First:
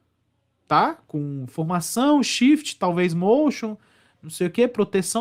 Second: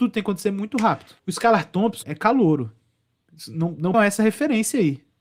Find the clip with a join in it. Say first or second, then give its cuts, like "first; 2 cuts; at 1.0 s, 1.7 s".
second; 3 cuts; at 1.2 s, 2.0 s, 3.9 s